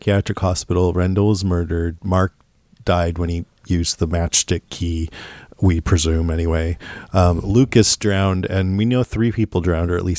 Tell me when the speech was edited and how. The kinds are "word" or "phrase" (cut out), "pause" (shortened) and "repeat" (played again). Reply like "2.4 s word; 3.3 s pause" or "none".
none